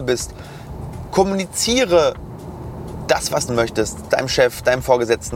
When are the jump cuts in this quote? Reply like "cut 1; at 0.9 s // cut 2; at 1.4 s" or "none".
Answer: cut 1; at 3.5 s